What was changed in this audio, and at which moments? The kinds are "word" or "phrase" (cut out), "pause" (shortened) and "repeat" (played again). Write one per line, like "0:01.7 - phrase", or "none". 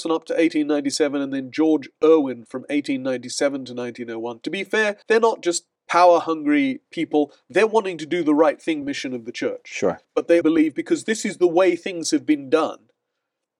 0:05.0 - pause
0:05.8 - pause
0:08.8 - phrase
0:10.0 - pause
0:10.4 - word